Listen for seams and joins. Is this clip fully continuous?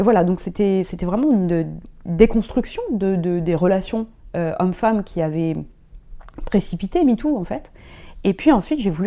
yes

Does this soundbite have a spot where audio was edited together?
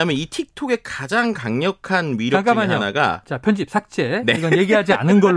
no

